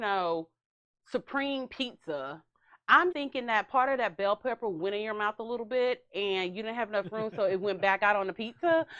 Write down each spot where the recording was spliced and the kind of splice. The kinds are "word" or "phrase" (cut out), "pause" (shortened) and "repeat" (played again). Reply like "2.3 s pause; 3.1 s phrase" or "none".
3.1 s word